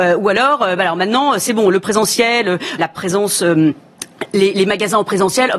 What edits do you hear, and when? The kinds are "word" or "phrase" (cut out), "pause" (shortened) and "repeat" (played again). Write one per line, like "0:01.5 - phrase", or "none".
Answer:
0:02.8 - phrase